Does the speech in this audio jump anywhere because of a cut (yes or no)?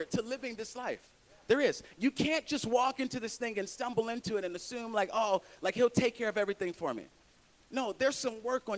no